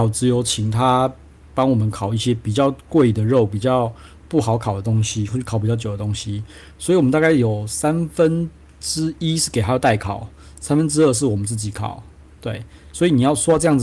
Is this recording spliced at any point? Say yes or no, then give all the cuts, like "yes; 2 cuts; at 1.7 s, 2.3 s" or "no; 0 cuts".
no; 0 cuts